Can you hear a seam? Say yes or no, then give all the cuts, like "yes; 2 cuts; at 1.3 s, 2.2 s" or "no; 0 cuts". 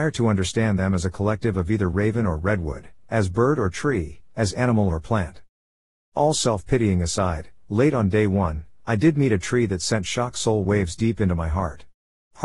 no; 0 cuts